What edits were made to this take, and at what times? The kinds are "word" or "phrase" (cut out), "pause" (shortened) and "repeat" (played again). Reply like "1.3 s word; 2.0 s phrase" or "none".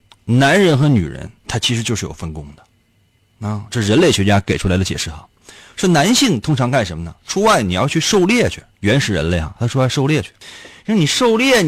8.7 s pause